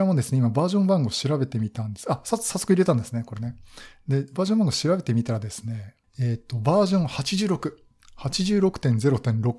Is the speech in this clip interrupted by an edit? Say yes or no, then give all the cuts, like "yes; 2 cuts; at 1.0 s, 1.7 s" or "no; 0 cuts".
no; 0 cuts